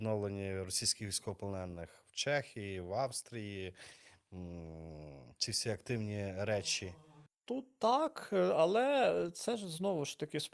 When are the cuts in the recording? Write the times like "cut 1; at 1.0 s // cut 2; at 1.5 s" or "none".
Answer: cut 1; at 7.3 s